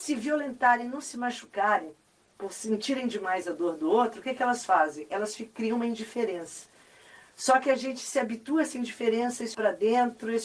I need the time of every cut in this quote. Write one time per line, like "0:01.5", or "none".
0:09.5